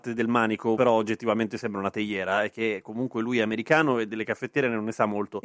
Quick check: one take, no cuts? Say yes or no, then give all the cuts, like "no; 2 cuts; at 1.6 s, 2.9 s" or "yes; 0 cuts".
yes; 0 cuts